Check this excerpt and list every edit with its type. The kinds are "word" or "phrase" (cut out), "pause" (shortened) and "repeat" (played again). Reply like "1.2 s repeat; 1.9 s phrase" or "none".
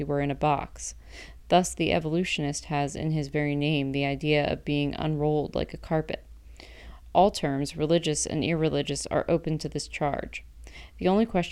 none